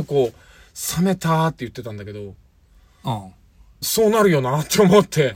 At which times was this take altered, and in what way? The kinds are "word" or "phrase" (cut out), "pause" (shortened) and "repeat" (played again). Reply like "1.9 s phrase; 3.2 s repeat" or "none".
3.8 s phrase